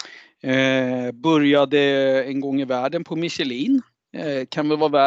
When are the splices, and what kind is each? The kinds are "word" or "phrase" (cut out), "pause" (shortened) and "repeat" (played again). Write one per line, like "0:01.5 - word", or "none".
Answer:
none